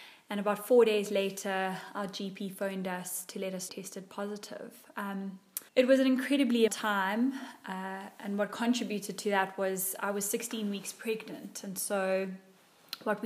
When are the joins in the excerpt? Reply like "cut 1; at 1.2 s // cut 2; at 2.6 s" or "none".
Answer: cut 1; at 3.7 s // cut 2; at 5.7 s // cut 3; at 6.7 s

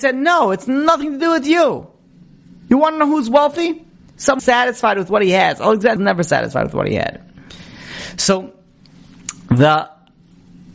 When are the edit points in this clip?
cut 1; at 4.4 s // cut 2; at 6.0 s

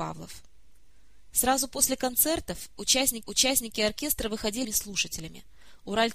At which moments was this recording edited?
cut 1; at 3.2 s // cut 2; at 4.6 s

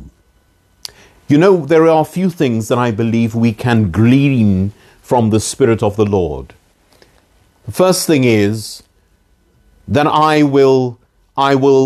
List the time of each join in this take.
none

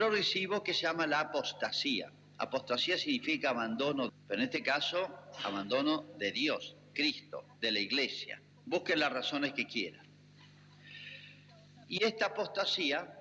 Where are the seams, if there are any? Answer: cut 1; at 4.1 s // cut 2; at 6.9 s // cut 3; at 8.5 s

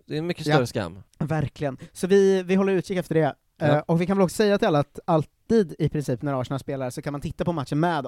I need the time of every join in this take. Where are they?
cut 1; at 1.1 s

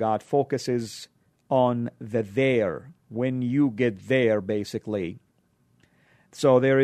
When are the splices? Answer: cut 1; at 1.3 s // cut 2; at 3.0 s

